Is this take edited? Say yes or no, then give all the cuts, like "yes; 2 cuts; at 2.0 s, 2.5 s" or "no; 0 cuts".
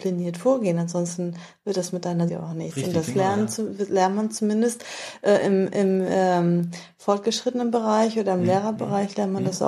yes; 1 cut; at 2.3 s